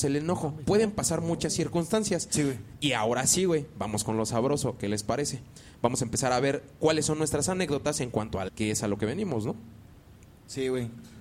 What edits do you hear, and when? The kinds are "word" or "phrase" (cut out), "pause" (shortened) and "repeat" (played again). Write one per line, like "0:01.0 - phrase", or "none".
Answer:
0:08.5 - word